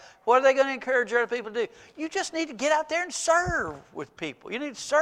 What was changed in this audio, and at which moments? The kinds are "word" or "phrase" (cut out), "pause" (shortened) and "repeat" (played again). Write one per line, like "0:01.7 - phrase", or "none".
none